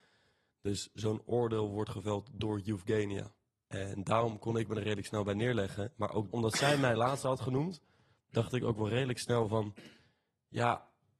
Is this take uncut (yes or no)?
yes